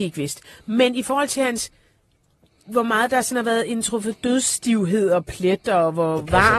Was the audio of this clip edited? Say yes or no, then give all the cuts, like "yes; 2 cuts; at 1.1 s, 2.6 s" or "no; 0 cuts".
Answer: no; 0 cuts